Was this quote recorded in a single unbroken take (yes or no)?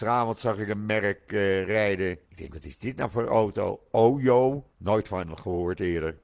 no